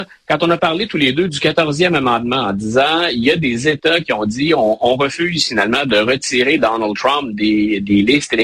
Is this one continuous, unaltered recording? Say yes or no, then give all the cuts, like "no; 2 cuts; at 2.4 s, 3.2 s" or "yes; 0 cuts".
yes; 0 cuts